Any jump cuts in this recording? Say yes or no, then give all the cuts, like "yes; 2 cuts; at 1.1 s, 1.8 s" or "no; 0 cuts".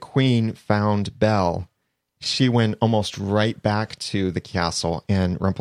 no; 0 cuts